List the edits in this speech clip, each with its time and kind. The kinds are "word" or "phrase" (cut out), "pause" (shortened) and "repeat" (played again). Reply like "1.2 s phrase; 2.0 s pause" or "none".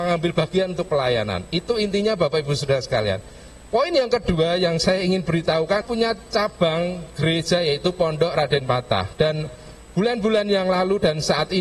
5.8 s phrase

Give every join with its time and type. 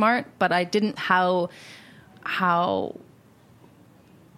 1.0 s word

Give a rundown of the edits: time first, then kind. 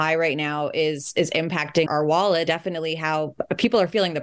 1.9 s word; 2.5 s word

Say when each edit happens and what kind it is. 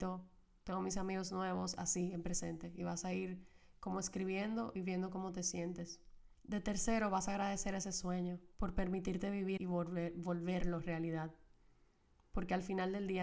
6.3 s pause; 8.5 s pause; 9.6 s phrase

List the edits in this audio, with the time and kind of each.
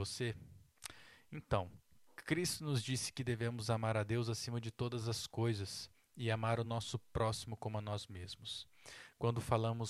none

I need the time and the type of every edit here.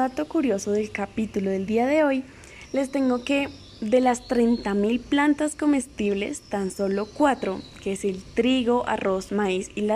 none

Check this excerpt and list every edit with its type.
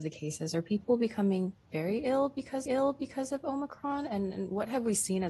2.7 s repeat

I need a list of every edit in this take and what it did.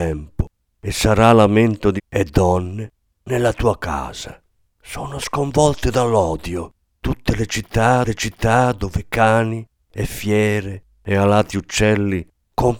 2.0 s word; 4.6 s pause; 8.0 s repeat

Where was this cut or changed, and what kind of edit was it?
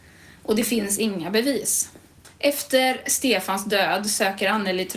none

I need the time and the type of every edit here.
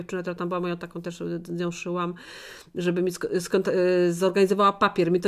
none

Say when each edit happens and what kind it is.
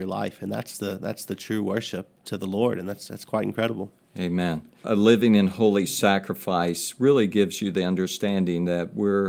none

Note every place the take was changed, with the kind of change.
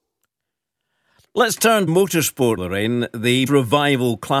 1.9 s word; 2.6 s word; 3.5 s word

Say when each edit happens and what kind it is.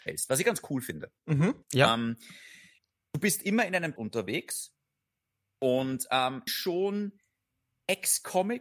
1.6 s pause; 4.0 s word; 6.5 s phrase

